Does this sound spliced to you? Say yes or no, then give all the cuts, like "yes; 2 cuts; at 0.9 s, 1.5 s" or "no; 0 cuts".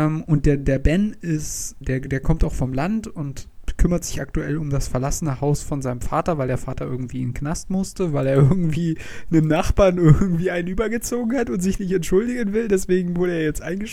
yes; 1 cut; at 1.8 s